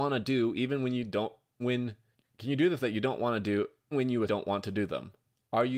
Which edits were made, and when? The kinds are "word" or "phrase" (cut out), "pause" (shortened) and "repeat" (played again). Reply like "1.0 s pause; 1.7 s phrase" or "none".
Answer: 1.6 s word; 2.8 s word; 3.9 s word; 4.2 s word